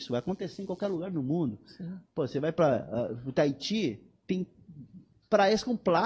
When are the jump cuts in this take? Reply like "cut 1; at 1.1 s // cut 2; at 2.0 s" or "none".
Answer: none